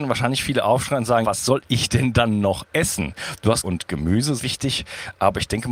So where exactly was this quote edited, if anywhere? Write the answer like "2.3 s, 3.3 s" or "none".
1.2 s, 3.6 s, 4.4 s